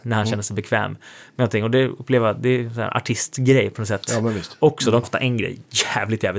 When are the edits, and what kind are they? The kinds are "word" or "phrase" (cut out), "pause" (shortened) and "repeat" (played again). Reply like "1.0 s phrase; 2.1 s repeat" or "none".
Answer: 5.0 s word